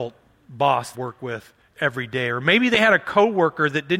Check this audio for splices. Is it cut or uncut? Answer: cut